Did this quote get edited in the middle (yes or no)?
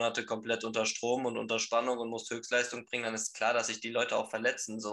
no